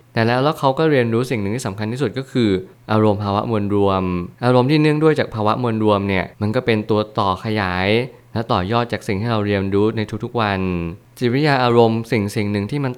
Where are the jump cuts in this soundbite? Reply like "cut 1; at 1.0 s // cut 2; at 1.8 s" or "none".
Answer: cut 1; at 4.3 s // cut 2; at 6.3 s